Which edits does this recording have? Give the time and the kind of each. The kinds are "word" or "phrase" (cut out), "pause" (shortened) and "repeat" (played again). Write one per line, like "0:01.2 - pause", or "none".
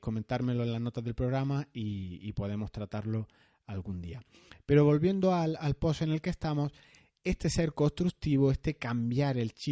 none